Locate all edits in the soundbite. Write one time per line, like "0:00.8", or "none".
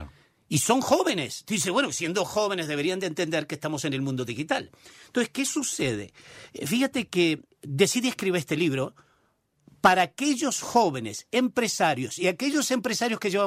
0:07.5

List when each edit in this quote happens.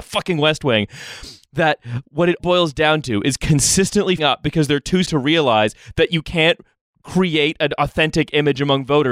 0:02.4
0:04.2
0:05.0

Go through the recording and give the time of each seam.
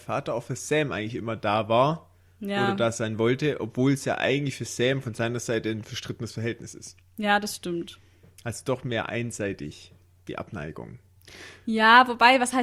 none

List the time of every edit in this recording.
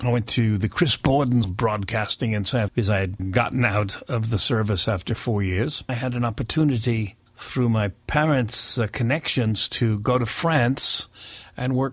0:01.4
0:02.7
0:03.2

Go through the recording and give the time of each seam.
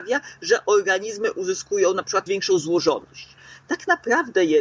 0:02.3

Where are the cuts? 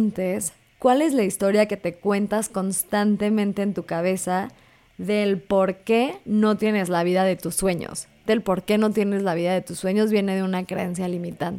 0:08.3

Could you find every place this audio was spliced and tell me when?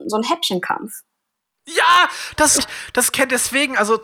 0:02.6

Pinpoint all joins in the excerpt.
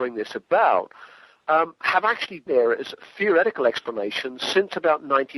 0:02.5

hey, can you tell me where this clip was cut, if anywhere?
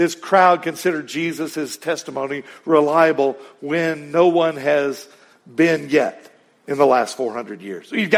none

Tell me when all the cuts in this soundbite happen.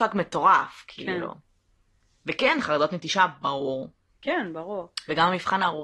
none

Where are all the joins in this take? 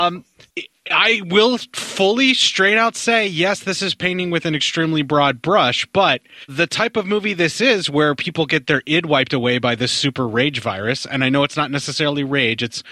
0:06.5

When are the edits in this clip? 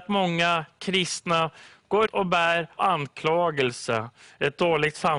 0:02.1
0:02.8

